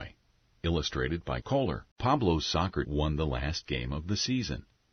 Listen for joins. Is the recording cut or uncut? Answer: cut